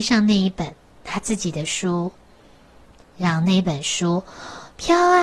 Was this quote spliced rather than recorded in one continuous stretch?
no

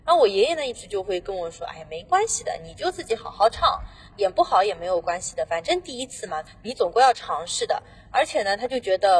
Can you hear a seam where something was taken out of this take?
no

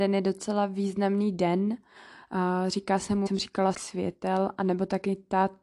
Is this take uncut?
no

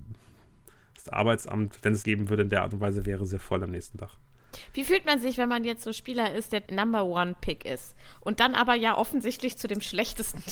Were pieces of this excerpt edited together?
yes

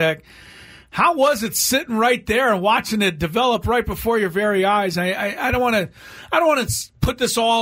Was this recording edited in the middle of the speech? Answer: no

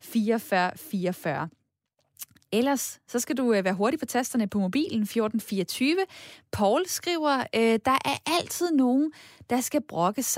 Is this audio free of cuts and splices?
yes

